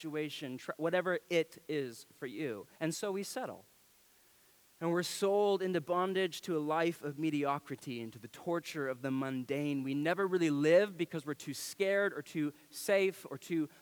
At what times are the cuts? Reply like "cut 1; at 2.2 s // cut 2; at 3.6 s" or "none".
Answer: cut 1; at 2.7 s